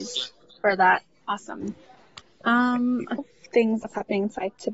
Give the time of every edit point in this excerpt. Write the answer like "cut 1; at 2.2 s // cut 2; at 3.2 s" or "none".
cut 1; at 3.2 s // cut 2; at 3.8 s